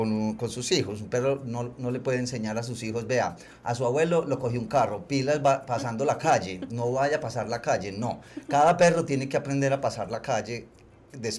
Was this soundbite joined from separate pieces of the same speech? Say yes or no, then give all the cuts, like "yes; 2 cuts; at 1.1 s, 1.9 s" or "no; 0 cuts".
no; 0 cuts